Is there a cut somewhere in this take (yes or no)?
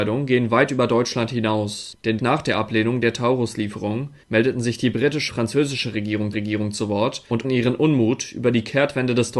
yes